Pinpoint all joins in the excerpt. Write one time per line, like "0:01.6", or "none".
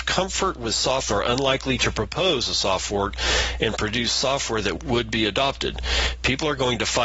0:01.1
0:04.8